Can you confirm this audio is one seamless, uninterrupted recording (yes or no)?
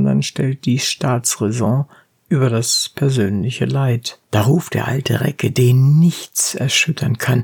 no